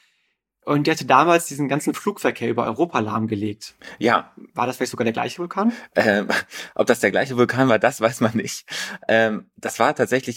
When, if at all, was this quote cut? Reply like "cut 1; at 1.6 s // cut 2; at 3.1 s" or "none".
none